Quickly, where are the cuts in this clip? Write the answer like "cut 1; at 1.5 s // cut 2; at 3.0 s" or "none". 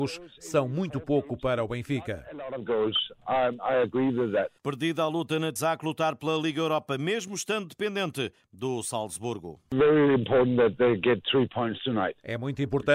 cut 1; at 4.6 s // cut 2; at 5.6 s